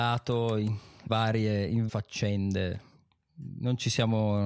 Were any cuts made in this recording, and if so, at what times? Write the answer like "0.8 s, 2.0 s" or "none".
1.1 s, 1.9 s